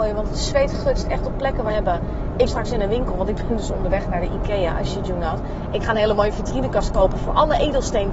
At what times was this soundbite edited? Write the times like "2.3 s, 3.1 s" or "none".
1.7 s, 2.5 s